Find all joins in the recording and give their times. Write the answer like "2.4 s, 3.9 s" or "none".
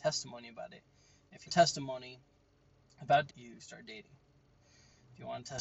1.5 s, 3.3 s